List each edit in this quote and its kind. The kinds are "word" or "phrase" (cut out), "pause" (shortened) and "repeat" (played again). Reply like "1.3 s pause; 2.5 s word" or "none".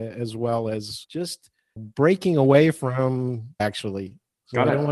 1.0 s word; 1.8 s word; 3.6 s word